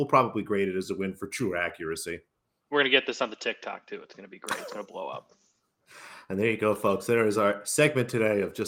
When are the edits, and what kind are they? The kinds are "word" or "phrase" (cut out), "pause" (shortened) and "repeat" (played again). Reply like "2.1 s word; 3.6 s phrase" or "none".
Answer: none